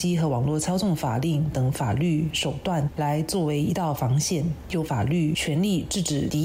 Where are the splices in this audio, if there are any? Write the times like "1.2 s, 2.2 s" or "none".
1.5 s